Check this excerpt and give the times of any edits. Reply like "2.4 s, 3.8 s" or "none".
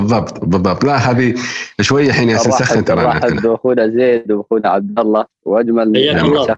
none